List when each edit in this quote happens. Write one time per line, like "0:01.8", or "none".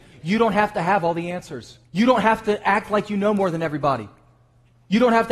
0:01.8